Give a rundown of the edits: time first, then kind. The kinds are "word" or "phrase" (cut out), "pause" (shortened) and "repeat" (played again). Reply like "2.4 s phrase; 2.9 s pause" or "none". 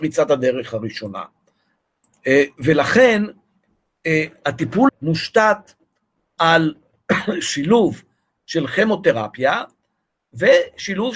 4.9 s word